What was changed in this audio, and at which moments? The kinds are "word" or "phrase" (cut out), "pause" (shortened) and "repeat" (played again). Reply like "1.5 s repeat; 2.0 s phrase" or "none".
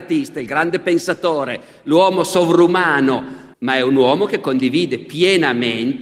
3.5 s pause

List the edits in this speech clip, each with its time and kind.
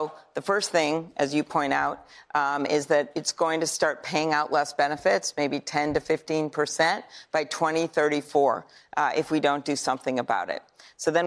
none

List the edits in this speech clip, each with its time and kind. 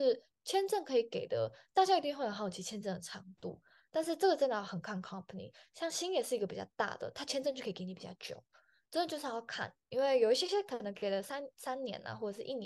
none

